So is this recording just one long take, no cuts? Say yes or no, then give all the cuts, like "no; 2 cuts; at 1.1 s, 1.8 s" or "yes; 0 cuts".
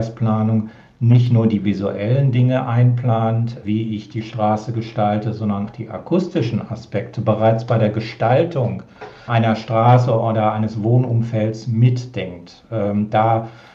no; 3 cuts; at 3.6 s, 5.7 s, 9.3 s